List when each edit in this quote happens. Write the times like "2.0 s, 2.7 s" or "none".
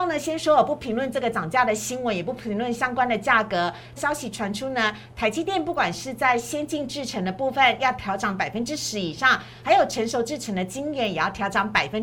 4.0 s